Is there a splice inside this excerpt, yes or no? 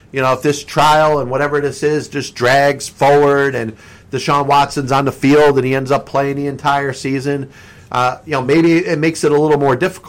no